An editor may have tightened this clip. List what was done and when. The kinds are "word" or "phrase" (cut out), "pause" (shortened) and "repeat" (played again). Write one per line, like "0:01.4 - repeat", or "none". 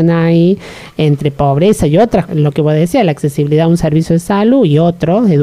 0:02.3 - word